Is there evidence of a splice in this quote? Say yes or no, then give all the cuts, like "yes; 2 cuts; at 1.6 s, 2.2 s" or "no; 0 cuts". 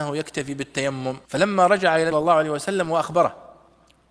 yes; 2 cuts; at 1.2 s, 2.1 s